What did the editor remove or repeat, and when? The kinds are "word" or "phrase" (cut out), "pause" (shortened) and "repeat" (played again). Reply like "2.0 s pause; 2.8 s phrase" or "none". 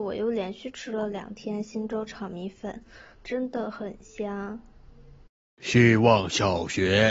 3.1 s pause; 5.4 s pause